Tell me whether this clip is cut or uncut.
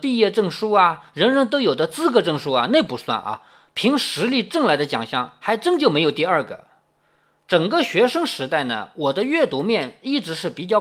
uncut